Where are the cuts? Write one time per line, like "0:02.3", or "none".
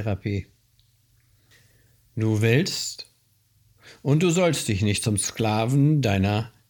none

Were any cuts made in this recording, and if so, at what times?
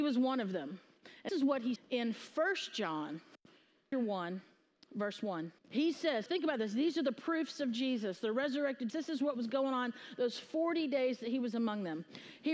0:01.3
0:01.8
0:03.9
0:05.6
0:06.3
0:08.9

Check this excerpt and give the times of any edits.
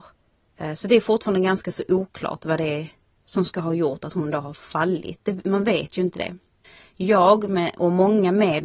none

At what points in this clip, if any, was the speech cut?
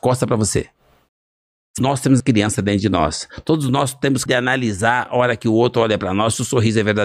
0:01.8
0:02.2
0:04.3

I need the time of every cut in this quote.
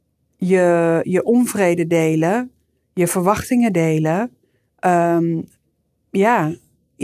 none

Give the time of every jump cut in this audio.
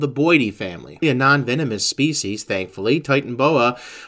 0:01.0

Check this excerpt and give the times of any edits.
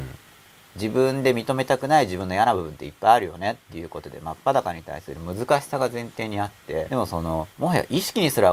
0:06.9
0:07.5

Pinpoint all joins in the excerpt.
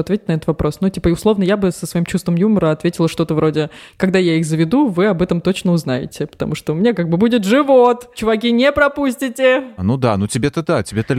none

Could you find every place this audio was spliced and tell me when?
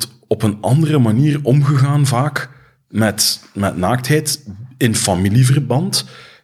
none

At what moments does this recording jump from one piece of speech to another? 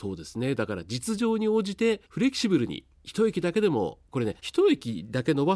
0:02.1
0:02.9
0:04.1
0:04.4

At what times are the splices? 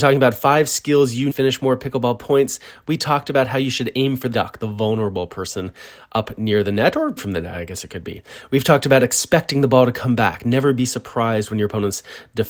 0:01.3
0:04.3
0:07.2

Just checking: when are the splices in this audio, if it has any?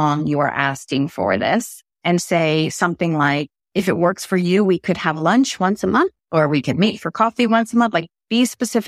0:01.9
0:03.6

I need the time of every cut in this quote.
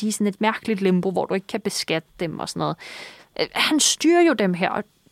none

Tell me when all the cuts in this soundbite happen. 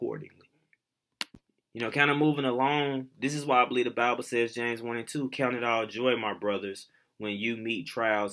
none

